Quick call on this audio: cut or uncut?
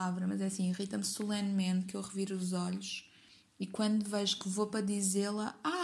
uncut